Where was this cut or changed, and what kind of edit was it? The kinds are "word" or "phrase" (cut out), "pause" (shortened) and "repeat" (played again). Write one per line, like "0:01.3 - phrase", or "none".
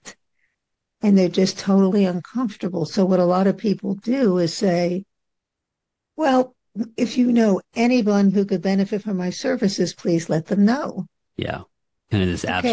none

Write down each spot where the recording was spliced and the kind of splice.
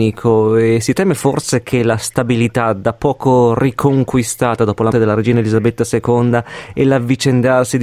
0:04.9 - word

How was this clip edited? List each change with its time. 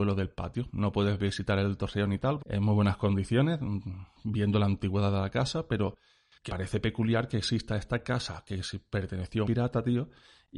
0:02.4 - phrase
0:06.5 - word
0:09.4 - word

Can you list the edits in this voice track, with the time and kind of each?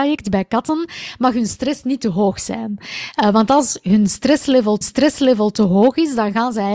0:04.8 - repeat

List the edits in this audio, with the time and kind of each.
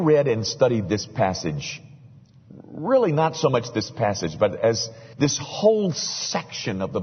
0:05.1 - pause

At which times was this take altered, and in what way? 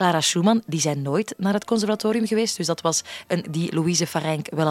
0:03.4 - word

